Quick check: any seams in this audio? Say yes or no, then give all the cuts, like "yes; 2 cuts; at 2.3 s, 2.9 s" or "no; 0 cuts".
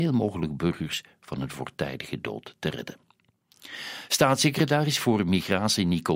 no; 0 cuts